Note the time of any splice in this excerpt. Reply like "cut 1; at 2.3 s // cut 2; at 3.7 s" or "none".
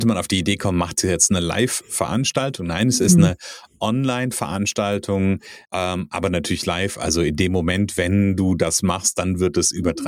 cut 1; at 5.6 s